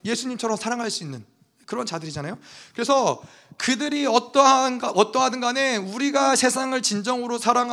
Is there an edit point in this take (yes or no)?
no